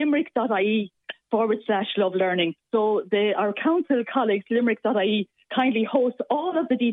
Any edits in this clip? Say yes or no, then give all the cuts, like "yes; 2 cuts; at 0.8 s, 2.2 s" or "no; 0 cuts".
yes; 1 cut; at 2.6 s